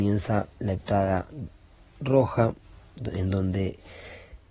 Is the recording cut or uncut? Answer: uncut